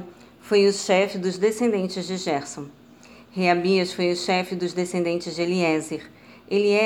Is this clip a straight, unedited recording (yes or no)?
yes